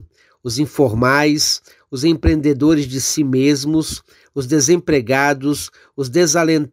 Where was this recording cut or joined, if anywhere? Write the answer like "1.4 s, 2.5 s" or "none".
none